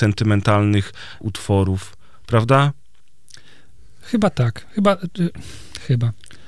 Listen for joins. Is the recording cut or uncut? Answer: cut